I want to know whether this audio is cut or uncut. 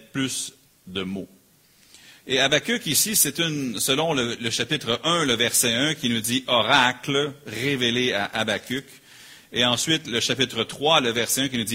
uncut